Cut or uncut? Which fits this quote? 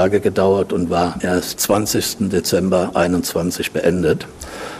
cut